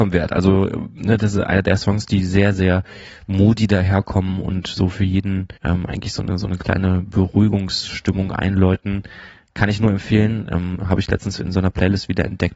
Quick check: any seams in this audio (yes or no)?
yes